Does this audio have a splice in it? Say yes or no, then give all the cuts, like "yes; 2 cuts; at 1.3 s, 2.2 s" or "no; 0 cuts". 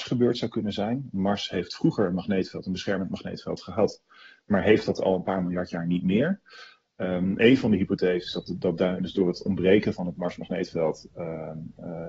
no; 0 cuts